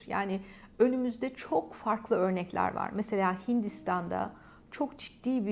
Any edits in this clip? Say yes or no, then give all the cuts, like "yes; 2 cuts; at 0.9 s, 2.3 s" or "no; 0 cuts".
no; 0 cuts